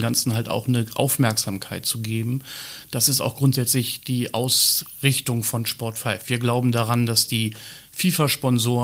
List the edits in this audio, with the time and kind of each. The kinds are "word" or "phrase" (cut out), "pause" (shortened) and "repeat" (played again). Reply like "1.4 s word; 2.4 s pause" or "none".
none